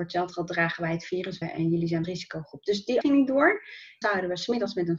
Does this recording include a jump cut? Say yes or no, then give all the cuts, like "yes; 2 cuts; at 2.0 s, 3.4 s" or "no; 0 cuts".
yes; 4 cuts; at 1.4 s, 2.0 s, 3.0 s, 4.0 s